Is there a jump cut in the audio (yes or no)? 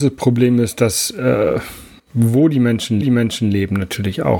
yes